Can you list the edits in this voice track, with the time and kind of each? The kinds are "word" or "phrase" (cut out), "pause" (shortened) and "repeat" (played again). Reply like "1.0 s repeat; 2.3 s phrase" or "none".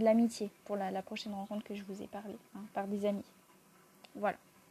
2.5 s pause

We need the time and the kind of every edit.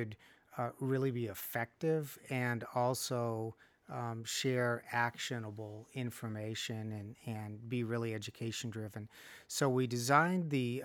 none

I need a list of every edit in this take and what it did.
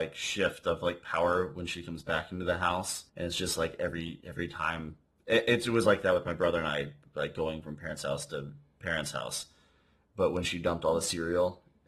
3.1 s pause

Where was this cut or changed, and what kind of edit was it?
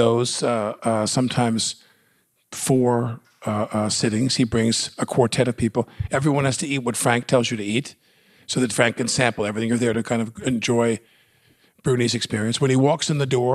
none

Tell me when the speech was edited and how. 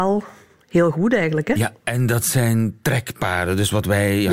none

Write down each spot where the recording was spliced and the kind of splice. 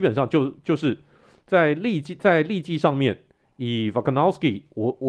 none

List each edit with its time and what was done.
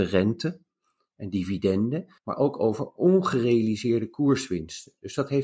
2.2 s pause

